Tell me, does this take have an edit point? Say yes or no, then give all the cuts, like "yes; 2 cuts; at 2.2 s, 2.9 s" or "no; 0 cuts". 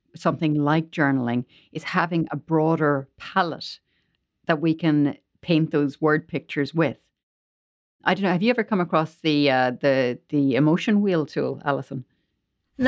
no; 0 cuts